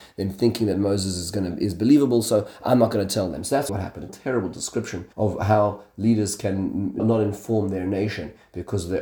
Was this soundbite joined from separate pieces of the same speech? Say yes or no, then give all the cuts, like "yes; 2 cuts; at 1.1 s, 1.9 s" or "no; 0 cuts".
yes; 4 cuts; at 3.7 s, 4.1 s, 5.1 s, 7.0 s